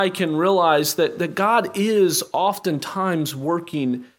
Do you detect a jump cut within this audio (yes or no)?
no